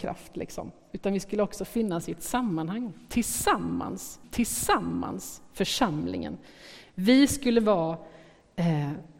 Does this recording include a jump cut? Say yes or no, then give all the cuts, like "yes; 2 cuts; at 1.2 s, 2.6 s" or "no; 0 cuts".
yes; 1 cut; at 4.2 s